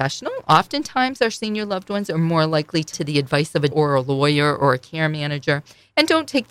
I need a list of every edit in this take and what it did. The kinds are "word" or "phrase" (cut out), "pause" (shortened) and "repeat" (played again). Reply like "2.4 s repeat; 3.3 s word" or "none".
2.9 s word; 3.7 s word